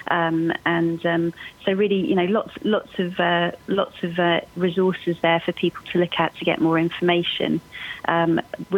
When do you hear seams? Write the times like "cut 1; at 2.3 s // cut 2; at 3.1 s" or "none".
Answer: none